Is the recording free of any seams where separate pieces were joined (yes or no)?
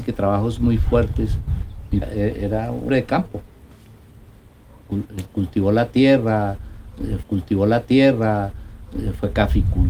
no